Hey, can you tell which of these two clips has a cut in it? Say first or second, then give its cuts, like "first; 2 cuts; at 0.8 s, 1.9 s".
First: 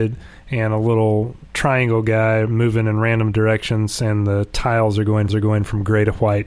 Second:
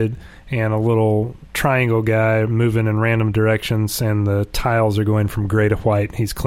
first; 1 cut; at 5.3 s